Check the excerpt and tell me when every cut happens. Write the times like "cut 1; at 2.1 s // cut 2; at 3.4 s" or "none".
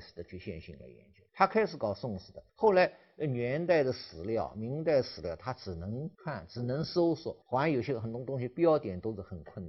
cut 1; at 1.3 s // cut 2; at 2.5 s // cut 3; at 6.1 s // cut 4; at 7.4 s